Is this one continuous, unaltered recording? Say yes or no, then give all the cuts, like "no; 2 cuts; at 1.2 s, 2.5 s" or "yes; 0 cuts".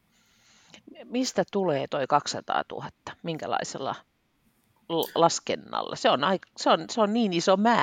yes; 0 cuts